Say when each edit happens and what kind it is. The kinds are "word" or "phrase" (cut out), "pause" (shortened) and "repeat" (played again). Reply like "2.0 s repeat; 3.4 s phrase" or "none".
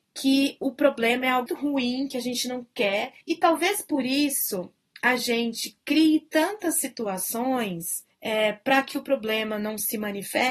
1.5 s word; 3.2 s pause; 8.1 s pause